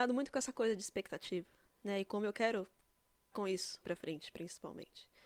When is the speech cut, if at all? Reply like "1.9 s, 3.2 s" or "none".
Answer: 3.3 s, 3.8 s